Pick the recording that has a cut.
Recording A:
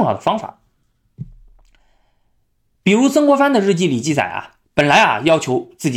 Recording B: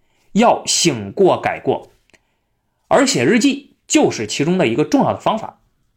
A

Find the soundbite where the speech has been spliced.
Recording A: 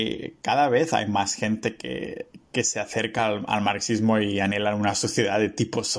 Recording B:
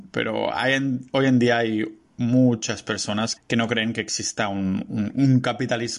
B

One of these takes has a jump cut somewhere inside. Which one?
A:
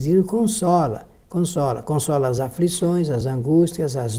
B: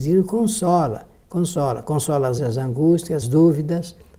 B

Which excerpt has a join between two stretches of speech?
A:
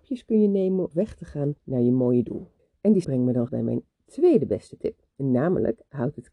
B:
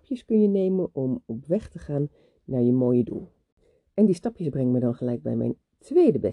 A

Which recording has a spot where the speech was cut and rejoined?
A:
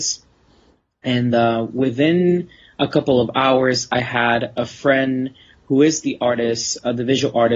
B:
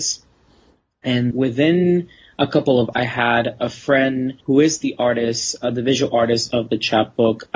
B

